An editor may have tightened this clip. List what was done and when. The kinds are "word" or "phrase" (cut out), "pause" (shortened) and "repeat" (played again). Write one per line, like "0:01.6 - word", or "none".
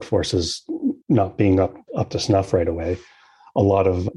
0:01.0 - pause